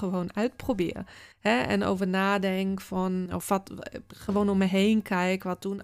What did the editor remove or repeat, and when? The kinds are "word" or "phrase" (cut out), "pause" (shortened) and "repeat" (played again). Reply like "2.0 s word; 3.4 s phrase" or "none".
1.3 s pause; 3.3 s word